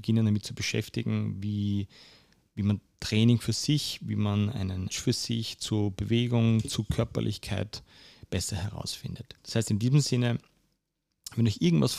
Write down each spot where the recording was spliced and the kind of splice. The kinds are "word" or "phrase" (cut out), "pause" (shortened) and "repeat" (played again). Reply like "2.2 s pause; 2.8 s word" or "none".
4.9 s word